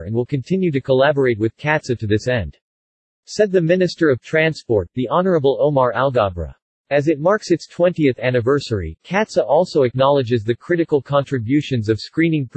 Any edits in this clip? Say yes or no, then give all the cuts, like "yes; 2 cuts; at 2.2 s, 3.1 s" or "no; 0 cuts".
no; 0 cuts